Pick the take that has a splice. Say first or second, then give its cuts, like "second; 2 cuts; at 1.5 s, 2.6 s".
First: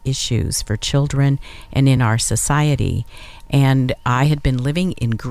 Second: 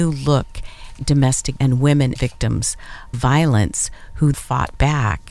second; 5 cuts; at 1.0 s, 1.6 s, 2.2 s, 3.1 s, 4.3 s